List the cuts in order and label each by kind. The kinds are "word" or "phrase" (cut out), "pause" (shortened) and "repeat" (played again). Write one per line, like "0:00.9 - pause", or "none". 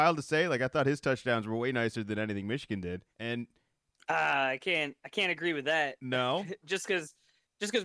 0:03.1 - pause